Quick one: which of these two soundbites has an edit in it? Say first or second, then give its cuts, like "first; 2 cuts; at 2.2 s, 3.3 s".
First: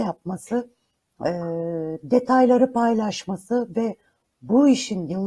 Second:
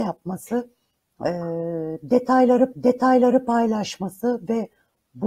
second; 1 cut; at 2.7 s